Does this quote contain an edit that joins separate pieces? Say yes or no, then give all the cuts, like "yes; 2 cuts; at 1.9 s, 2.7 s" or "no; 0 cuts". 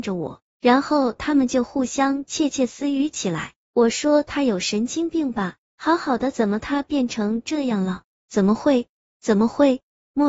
no; 0 cuts